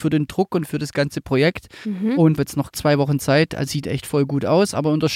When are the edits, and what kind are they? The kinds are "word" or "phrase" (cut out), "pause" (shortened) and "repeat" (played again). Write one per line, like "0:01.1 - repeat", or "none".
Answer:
0:02.4 - phrase
0:02.7 - word
0:03.7 - word